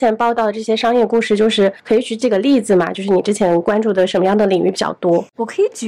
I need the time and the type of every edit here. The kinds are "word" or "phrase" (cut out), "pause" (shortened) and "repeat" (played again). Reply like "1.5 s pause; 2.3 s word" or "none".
1.8 s pause

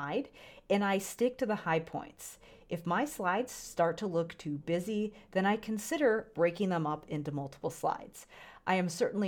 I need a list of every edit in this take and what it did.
none

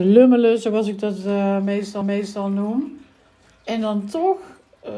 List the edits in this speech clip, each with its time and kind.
2.0 s repeat

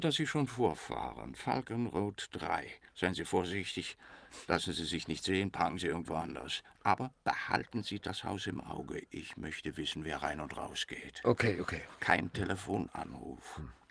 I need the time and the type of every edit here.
none

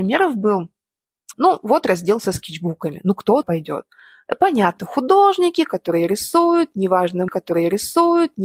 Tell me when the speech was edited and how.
1.3 s word; 3.4 s word; 4.8 s word; 7.3 s repeat

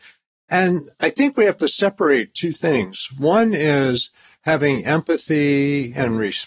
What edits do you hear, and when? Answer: none

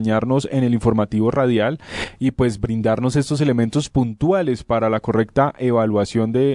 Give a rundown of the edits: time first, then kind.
none

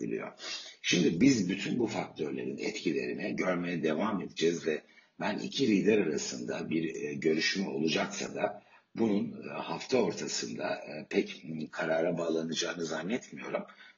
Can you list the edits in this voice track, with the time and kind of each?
none

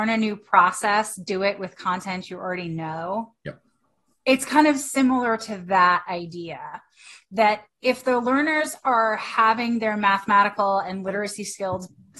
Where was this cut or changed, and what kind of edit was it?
none

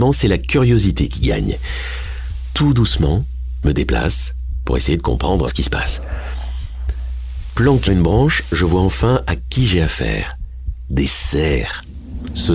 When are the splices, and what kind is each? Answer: 3.6 s word; 5.5 s word; 7.9 s word

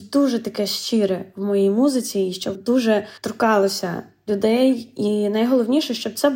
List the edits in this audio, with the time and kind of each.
2.6 s word; 3.2 s pause

